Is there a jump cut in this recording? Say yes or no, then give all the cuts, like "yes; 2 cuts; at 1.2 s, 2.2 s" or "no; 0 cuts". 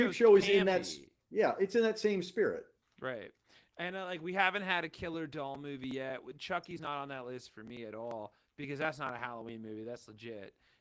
no; 0 cuts